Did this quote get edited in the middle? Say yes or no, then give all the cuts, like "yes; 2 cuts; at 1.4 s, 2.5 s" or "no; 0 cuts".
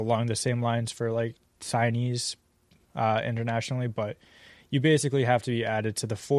no; 0 cuts